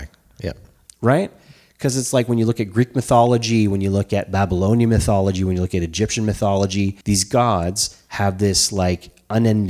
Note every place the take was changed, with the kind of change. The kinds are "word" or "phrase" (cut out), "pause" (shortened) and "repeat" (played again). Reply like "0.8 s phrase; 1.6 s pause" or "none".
7.0 s pause